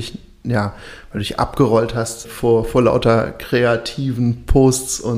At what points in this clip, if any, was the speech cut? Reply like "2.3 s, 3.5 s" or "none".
2.2 s